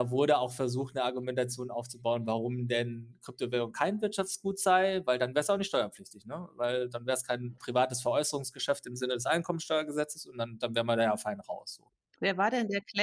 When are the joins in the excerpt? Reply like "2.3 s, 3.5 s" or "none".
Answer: 7.6 s, 12.0 s